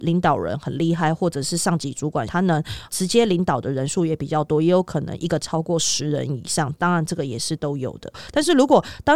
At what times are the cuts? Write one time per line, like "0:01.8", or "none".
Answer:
0:05.4